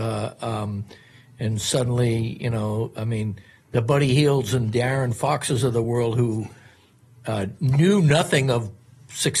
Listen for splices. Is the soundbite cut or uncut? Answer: uncut